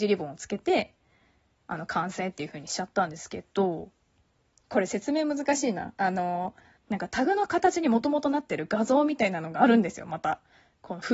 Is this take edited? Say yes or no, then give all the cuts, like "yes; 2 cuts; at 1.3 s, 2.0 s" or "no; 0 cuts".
no; 0 cuts